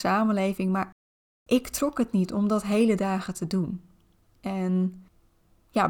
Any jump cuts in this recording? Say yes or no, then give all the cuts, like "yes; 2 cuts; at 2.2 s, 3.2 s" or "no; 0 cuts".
no; 0 cuts